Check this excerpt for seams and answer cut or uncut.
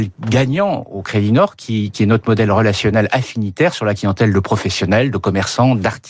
uncut